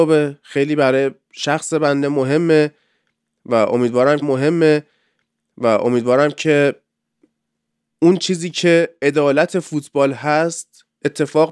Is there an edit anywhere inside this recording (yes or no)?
yes